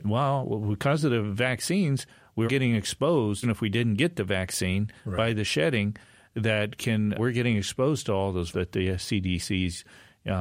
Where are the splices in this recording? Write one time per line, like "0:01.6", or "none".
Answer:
0:02.5
0:03.4
0:07.2
0:08.5